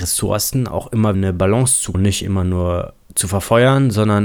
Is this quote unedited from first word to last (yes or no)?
no